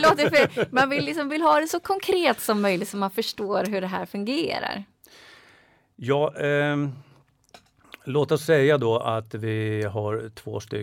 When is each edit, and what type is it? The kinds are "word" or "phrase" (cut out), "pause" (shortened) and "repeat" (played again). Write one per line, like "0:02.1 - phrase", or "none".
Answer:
0:01.3 - word

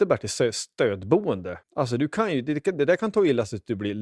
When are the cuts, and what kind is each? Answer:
0:01.6 - pause

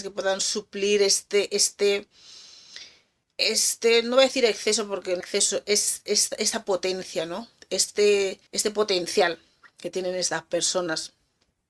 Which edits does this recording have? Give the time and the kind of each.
0:03.2 - pause
0:05.2 - phrase
0:08.5 - pause

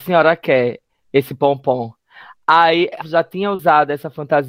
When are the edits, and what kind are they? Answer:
0:03.0 - word

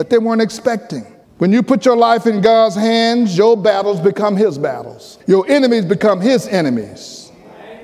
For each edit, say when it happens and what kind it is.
0:01.2 - pause
0:05.2 - pause

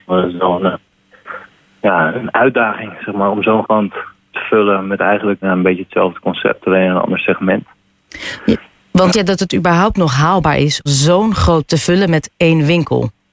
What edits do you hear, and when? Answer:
0:02.1 - word
0:03.6 - word
0:04.3 - word
0:05.4 - word
0:09.1 - word
0:10.9 - word
0:11.7 - word

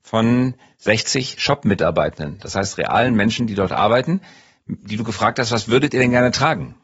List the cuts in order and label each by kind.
none

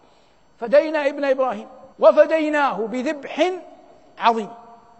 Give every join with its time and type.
0:01.9 - pause

